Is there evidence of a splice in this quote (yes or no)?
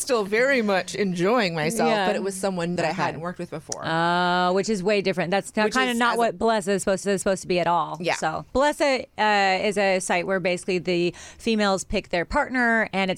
yes